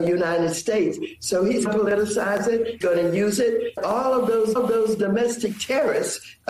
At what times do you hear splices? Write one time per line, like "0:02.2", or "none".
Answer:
0:01.7
0:02.8
0:03.8
0:04.6